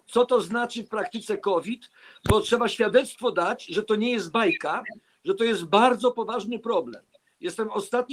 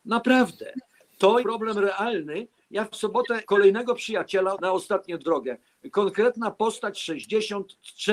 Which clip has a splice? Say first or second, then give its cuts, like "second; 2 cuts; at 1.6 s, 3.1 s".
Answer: second; 6 cuts; at 1.4 s, 2.9 s, 3.4 s, 4.5 s, 5.2 s, 6.9 s